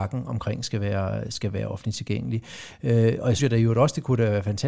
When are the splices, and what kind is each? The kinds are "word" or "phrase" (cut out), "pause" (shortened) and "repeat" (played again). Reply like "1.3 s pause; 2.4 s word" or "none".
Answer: 3.4 s word